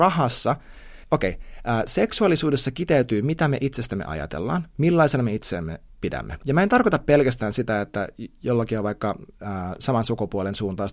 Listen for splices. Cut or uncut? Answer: cut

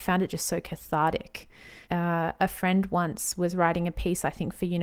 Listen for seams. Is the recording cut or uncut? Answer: cut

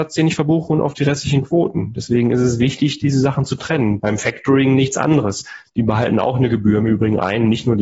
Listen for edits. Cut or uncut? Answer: uncut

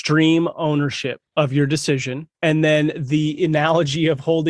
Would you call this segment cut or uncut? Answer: cut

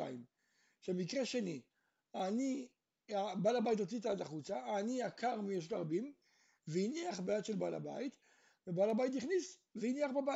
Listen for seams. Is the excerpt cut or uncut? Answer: uncut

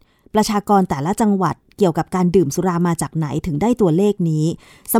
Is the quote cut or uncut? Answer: uncut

